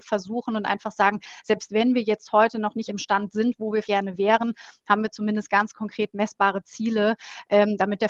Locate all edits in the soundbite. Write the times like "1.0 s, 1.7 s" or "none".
2.9 s, 3.8 s